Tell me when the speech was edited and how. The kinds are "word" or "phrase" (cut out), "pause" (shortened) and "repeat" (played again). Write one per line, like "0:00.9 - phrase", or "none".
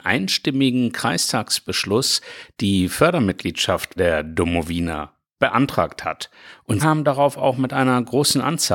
0:04.0 - word
0:06.8 - word

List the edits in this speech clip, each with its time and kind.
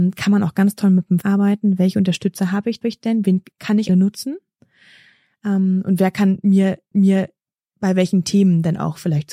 0:01.2 - word
0:02.8 - repeat
0:03.5 - pause
0:03.9 - phrase
0:06.9 - repeat

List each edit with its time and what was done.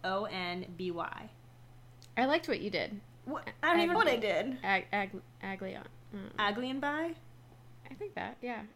0:03.9 - word
0:07.8 - pause

